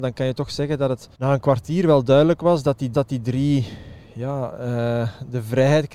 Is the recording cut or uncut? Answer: cut